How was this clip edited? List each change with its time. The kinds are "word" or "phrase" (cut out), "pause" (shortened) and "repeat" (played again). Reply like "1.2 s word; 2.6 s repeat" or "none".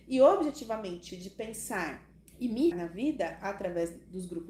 1.1 s phrase; 2.2 s pause; 2.7 s word